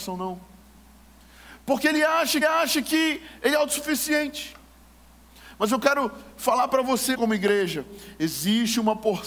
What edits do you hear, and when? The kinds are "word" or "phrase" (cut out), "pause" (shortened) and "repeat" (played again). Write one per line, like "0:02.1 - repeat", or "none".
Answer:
0:02.4 - repeat
0:07.1 - word